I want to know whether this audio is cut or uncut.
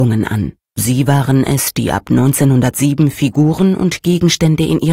uncut